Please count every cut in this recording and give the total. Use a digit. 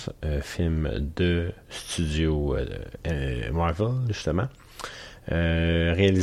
1